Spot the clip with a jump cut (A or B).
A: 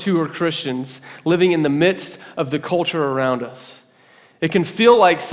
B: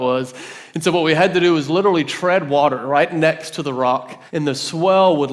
B